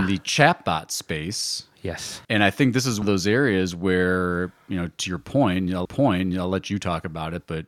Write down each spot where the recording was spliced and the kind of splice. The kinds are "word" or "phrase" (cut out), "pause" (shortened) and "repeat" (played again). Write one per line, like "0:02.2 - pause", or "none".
0:02.2 - pause
0:03.0 - word
0:05.8 - repeat